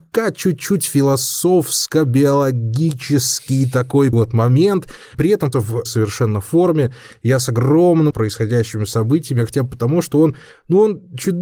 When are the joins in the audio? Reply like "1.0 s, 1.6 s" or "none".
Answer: 4.1 s, 5.1 s, 5.5 s, 5.9 s, 8.1 s